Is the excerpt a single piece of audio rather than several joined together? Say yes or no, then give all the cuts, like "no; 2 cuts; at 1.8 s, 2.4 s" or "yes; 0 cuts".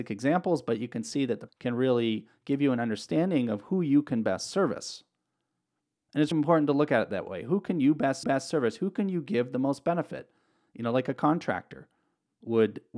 no; 3 cuts; at 1.5 s, 6.3 s, 8.2 s